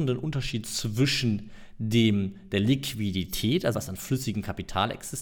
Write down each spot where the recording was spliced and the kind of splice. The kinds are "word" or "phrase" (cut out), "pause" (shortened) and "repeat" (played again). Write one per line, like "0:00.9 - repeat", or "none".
0:03.7 - word